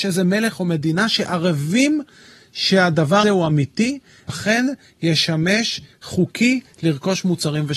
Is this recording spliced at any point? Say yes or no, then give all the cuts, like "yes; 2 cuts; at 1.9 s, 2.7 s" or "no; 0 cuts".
yes; 3 cuts; at 3.2 s, 4.3 s, 5.9 s